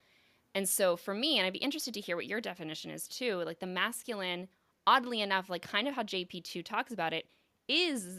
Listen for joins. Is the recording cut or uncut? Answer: uncut